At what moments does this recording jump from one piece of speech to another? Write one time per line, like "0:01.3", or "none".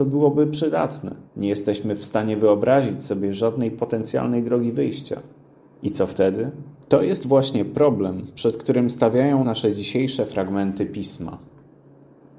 0:01.3
0:05.4
0:06.8
0:09.4